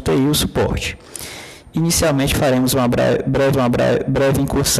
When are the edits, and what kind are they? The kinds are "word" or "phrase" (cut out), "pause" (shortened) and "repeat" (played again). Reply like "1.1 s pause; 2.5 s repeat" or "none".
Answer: 3.5 s repeat